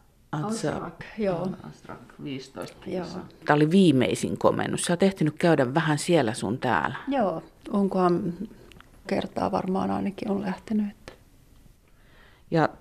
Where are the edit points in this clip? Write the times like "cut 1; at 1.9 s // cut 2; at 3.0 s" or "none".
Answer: cut 1; at 9.1 s